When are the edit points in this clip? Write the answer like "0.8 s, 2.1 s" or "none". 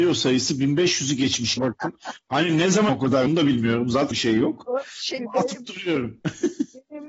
1.6 s, 2.9 s, 3.3 s, 4.1 s, 5.2 s